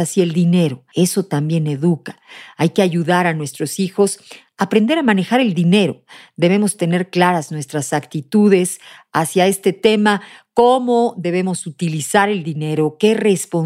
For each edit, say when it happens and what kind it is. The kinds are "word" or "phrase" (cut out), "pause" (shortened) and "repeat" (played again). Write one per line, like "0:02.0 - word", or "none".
none

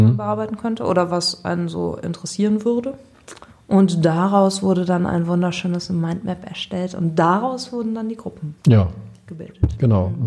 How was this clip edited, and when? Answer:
0:03.5 - pause
0:08.6 - pause

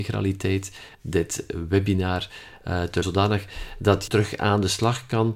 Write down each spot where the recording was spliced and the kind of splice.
0:00.9 - word
0:03.0 - word
0:04.1 - word

